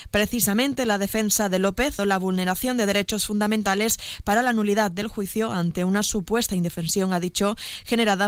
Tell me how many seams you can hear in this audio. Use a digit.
1